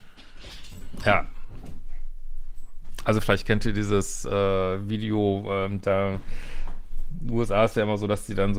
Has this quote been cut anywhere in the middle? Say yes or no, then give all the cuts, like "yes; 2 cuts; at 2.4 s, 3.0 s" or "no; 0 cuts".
no; 0 cuts